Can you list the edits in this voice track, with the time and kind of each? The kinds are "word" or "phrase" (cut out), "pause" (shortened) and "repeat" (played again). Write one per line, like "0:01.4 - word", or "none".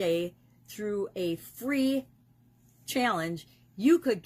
none